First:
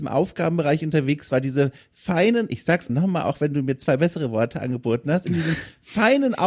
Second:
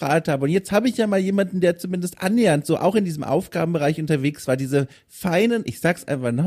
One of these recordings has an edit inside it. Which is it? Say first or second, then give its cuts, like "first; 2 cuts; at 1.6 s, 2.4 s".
first; 1 cut; at 2.9 s